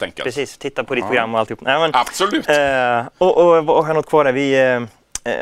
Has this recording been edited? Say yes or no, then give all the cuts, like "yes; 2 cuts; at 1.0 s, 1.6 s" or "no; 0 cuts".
no; 0 cuts